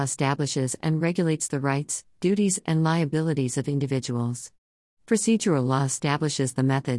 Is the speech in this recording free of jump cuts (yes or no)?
yes